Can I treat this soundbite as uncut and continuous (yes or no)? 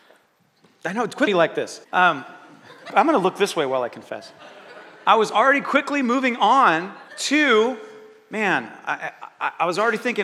no